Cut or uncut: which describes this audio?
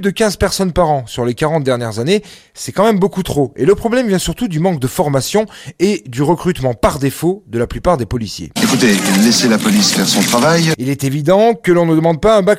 uncut